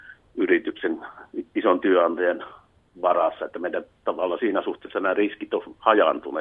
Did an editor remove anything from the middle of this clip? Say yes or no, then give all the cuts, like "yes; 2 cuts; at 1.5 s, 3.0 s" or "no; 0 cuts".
no; 0 cuts